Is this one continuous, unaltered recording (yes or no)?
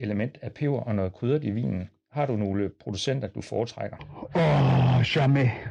yes